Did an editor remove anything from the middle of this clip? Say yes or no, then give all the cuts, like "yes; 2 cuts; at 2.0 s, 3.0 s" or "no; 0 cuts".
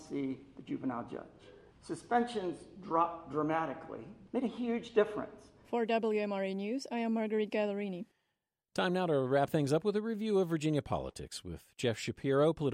no; 0 cuts